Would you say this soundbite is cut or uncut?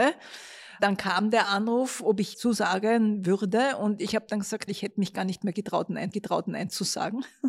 cut